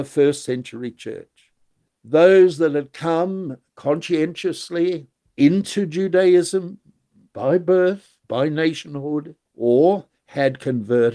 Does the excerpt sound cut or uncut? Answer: cut